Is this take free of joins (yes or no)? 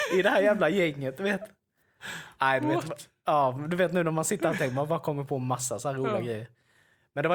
yes